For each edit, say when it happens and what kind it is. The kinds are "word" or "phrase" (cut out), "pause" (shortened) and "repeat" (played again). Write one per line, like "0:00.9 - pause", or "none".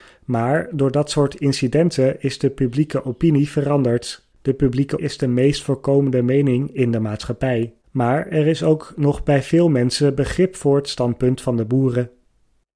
0:04.3 - pause
0:05.0 - word
0:07.8 - pause